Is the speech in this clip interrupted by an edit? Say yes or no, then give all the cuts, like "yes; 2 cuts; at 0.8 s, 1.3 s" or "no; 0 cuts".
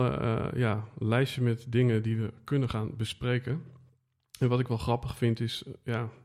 no; 0 cuts